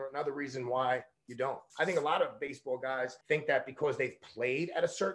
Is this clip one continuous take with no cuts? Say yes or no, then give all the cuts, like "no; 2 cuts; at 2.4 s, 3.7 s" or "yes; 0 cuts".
no; 2 cuts; at 1.7 s, 3.2 s